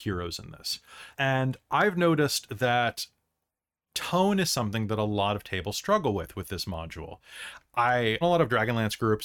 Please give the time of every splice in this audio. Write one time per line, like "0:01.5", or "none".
0:01.1
0:08.2